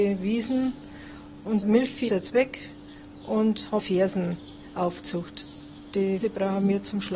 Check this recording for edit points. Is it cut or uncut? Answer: cut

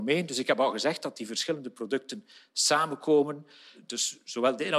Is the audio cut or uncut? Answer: uncut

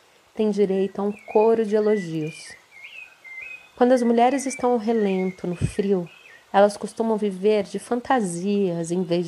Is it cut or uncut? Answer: uncut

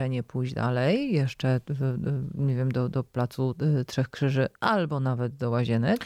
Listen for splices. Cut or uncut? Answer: uncut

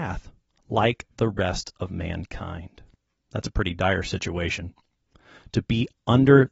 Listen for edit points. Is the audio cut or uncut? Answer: cut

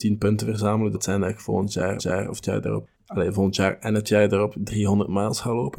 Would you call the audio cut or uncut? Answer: cut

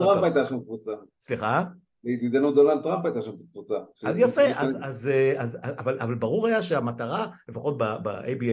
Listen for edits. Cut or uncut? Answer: uncut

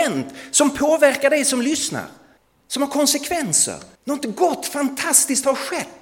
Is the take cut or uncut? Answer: cut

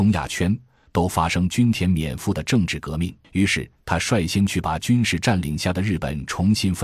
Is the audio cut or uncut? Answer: cut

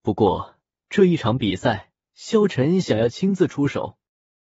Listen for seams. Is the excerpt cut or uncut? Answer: cut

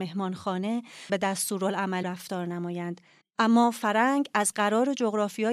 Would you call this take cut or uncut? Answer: cut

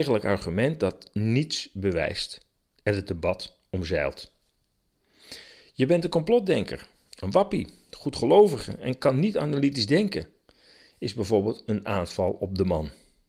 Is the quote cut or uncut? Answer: uncut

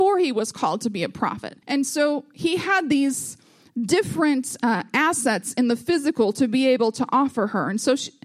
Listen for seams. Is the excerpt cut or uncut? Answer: cut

